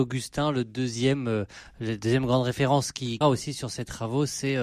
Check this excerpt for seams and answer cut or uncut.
cut